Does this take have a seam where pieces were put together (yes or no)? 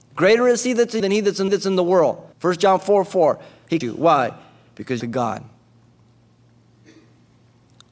yes